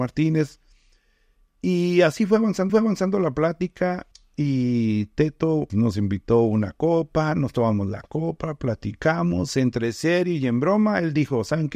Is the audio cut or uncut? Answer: cut